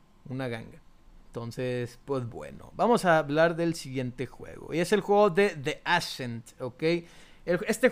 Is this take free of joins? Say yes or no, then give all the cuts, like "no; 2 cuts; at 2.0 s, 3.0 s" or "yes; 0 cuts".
no; 1 cut; at 1.1 s